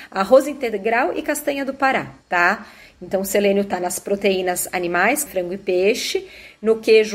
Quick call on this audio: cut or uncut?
cut